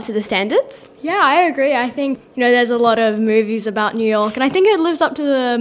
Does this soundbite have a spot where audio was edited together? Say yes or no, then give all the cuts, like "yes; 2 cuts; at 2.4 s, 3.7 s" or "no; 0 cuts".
no; 0 cuts